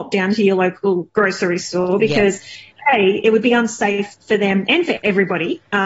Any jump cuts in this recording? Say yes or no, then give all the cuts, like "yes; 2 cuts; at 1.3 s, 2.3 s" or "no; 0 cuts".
no; 0 cuts